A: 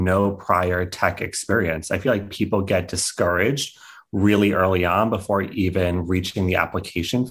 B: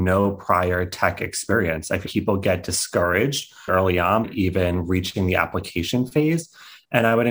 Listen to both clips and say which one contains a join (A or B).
B